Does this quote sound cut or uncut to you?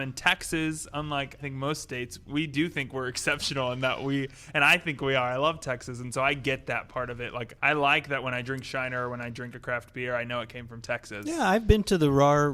cut